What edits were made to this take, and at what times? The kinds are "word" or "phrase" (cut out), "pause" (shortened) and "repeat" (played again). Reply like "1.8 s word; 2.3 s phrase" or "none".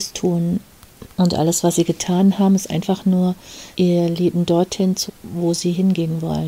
1.1 s pause; 3.7 s pause; 5.1 s word

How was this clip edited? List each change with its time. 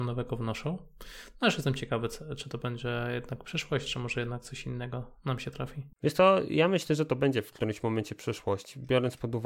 5.9 s pause

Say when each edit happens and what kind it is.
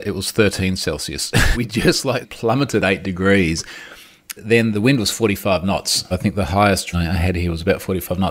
1.5 s word; 2.2 s word; 4.4 s word; 4.7 s word; 6.1 s word; 6.9 s word

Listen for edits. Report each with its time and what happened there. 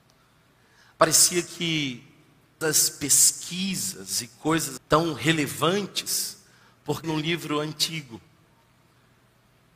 2.6 s phrase; 4.8 s word; 7.0 s word

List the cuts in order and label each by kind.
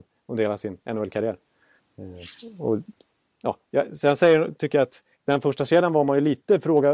1.8 s pause; 5.1 s pause

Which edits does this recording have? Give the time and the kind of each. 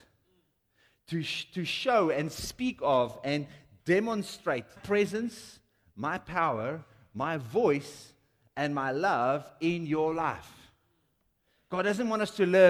4.8 s word

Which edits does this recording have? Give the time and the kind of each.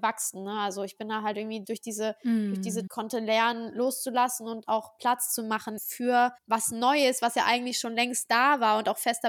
1.6 s word; 2.9 s phrase; 5.8 s word; 6.4 s pause

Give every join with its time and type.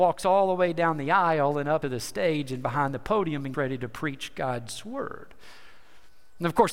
1.8 s word; 3.5 s word

